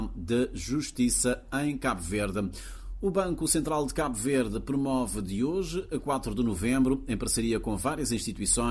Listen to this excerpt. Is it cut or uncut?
uncut